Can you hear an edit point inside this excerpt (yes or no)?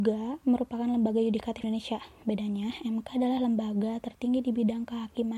yes